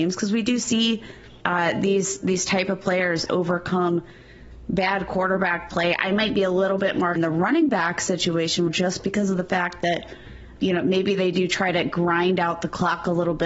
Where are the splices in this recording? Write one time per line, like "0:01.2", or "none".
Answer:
0:01.4
0:07.2
0:08.7
0:10.6